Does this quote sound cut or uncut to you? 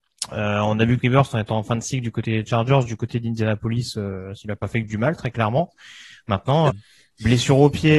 cut